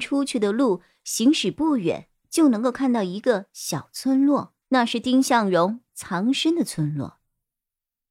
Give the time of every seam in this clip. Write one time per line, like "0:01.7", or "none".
0:04.6